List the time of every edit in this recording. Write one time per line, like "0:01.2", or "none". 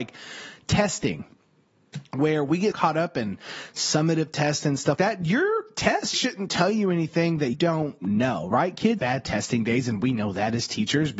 0:02.7
0:05.0
0:06.1
0:07.5
0:09.0